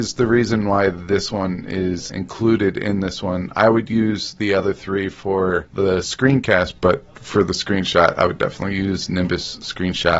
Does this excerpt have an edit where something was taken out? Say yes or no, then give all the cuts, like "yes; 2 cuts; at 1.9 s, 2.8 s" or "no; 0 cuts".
yes; 2 cuts; at 2.1 s, 6.8 s